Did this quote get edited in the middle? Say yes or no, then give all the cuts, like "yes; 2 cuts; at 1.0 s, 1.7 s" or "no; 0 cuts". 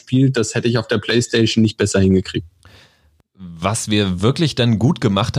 no; 0 cuts